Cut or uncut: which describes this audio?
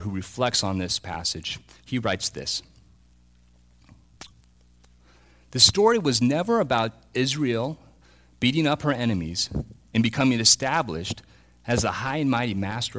uncut